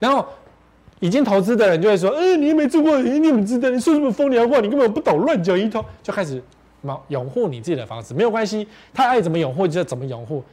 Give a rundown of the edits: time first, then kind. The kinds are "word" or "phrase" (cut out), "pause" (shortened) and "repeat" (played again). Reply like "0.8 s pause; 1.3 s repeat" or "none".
none

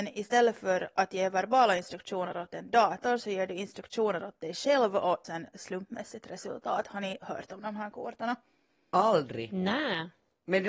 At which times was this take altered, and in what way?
5.2 s word

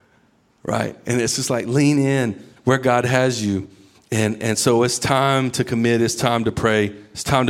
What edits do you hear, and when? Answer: none

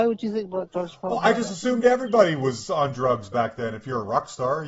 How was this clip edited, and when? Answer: none

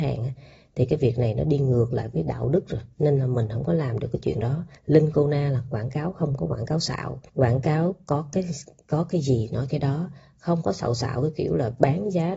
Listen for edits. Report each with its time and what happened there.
2.9 s pause; 4.8 s pause; 7.3 s pause

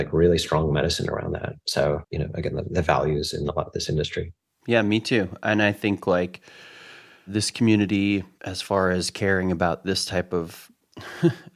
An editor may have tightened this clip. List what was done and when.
2.0 s phrase

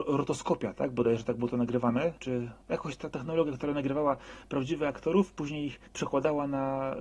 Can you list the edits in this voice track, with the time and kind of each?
5.9 s pause

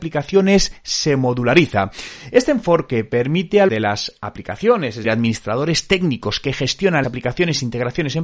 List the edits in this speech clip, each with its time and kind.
3.7 s phrase; 5.0 s word; 7.0 s word

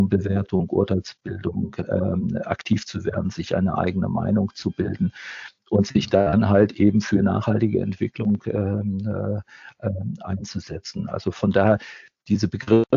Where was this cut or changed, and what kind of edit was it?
none

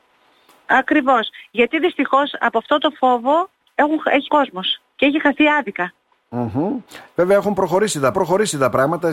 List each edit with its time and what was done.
4.3 s word; 8.1 s repeat

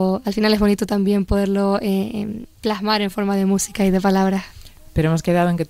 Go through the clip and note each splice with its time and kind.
none

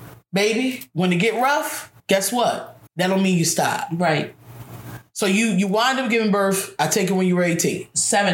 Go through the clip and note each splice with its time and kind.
2.0 s pause; 2.9 s pause

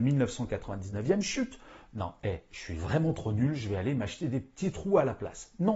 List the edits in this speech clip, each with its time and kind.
none

